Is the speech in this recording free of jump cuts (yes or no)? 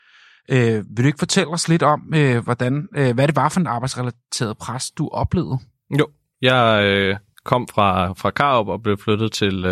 yes